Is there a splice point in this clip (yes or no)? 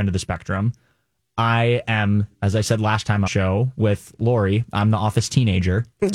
yes